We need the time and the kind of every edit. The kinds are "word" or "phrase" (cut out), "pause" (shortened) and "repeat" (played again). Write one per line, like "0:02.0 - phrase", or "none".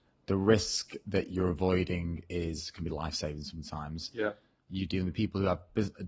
none